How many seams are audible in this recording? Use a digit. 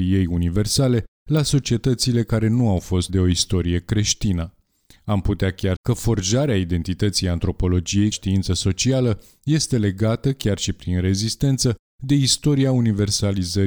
3